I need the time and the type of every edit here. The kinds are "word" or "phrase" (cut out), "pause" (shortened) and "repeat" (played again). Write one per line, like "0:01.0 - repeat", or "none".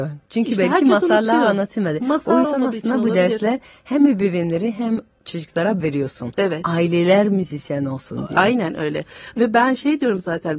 0:02.4 - word
0:05.8 - word